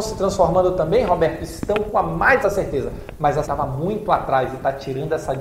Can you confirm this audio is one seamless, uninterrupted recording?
no; 2 cuts; at 2.4 s, 3.4 s

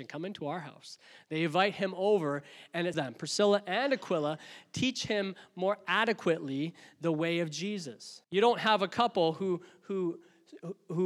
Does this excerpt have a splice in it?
yes; 2 cuts; at 2.9 s, 8.2 s

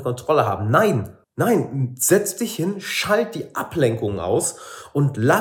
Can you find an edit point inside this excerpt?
yes; 1 cut; at 1.2 s

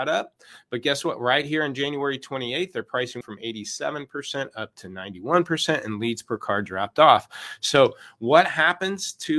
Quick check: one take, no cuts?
no; 1 cut; at 3.2 s

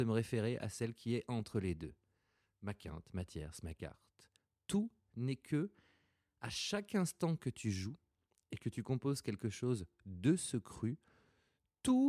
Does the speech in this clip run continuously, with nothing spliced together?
yes; 0 cuts

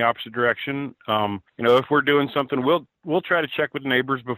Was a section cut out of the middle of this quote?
no; 0 cuts

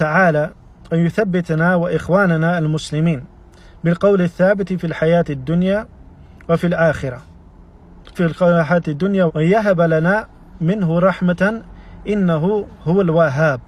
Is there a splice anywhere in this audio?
yes; 2 cuts; at 8.1 s, 9.3 s

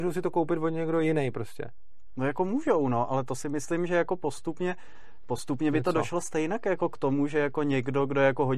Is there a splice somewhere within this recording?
no; 0 cuts

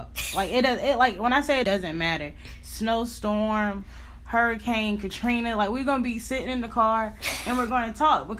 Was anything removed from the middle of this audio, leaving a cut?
yes; 1 cut; at 1.6 s

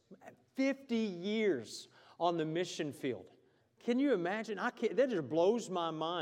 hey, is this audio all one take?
no; 1 cut; at 3.6 s

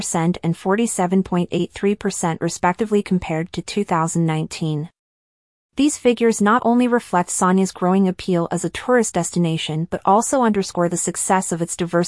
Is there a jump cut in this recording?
no; 0 cuts

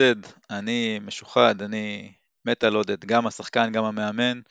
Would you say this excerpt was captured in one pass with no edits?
yes; 0 cuts

